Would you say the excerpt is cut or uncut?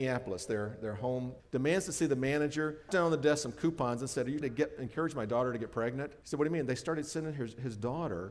cut